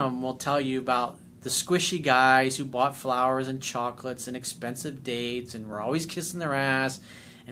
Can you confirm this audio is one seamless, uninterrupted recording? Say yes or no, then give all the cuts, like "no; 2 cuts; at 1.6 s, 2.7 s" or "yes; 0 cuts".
yes; 0 cuts